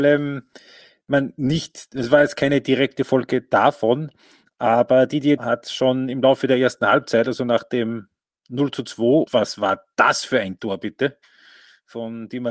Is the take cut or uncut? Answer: cut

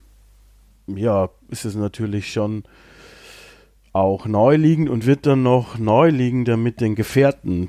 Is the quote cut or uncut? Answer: uncut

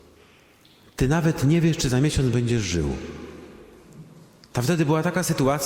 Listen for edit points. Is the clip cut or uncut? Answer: uncut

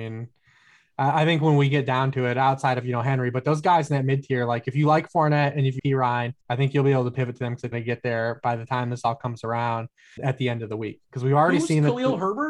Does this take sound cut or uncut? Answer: cut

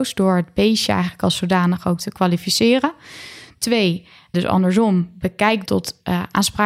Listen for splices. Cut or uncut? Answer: cut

